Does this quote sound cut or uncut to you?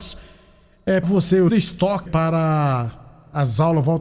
cut